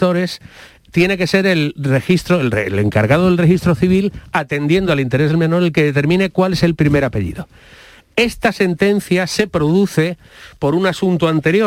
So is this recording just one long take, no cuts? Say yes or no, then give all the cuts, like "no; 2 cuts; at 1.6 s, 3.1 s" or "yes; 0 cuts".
yes; 0 cuts